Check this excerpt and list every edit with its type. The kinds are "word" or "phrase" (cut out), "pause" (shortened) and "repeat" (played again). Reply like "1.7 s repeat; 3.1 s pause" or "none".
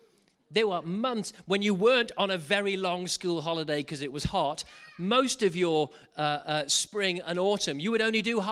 none